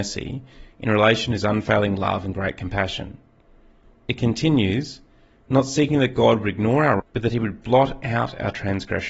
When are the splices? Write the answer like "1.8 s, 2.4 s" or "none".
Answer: 7.0 s